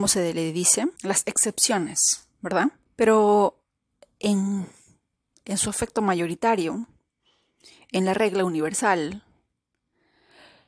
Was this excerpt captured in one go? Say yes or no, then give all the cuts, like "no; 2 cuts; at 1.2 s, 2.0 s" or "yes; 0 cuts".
no; 2 cuts; at 1.0 s, 2.9 s